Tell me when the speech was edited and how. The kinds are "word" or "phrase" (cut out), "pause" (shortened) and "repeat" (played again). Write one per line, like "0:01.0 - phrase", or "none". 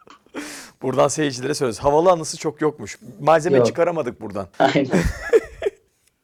0:04.5 - pause